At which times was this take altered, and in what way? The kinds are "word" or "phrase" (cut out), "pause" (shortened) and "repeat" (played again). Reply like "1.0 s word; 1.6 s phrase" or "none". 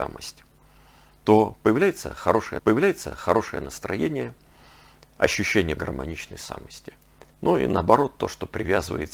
2.6 s repeat; 5.8 s word; 7.3 s pause